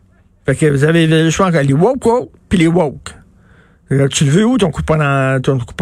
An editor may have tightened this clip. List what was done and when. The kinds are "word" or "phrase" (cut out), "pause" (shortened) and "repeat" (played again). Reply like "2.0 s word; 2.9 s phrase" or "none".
none

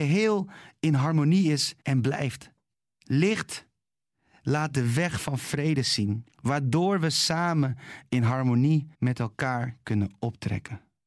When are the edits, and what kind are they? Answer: 1.8 s pause; 2.7 s pause; 6.3 s pause; 8.9 s pause

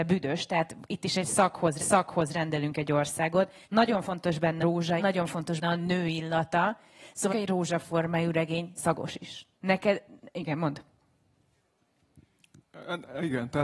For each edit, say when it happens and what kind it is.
1.8 s repeat; 3.6 s pause; 4.6 s word; 5.0 s word; 5.6 s word; 7.3 s phrase; 8.8 s word; 9.5 s pause

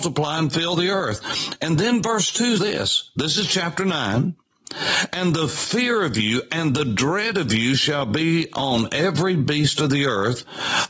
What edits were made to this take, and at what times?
2.6 s word

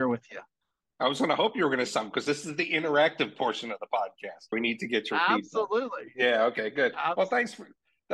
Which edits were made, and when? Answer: 1.9 s word; 4.5 s word

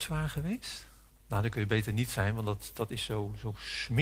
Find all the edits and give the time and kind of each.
1.1 s pause

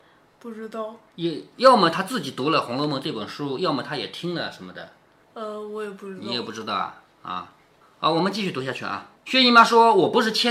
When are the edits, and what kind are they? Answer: 9.2 s pause

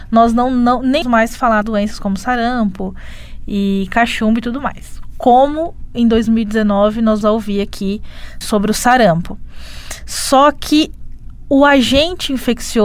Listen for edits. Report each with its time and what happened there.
1.0 s word; 1.6 s word; 7.2 s word; 8.4 s word

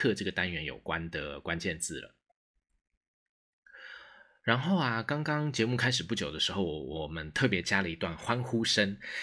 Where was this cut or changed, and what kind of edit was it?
none

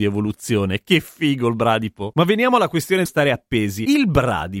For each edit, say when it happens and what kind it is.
3.1 s word

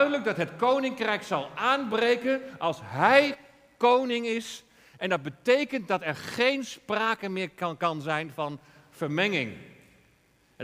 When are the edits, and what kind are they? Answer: none

